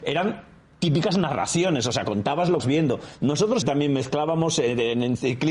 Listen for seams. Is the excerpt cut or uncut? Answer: cut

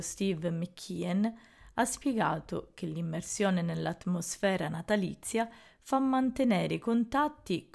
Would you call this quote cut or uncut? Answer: uncut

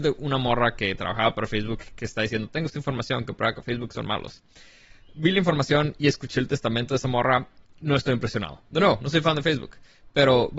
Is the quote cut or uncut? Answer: uncut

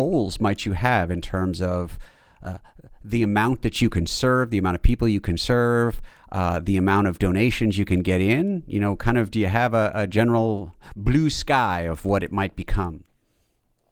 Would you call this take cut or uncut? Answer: uncut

